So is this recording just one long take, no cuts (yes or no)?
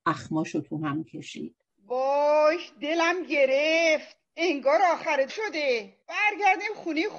no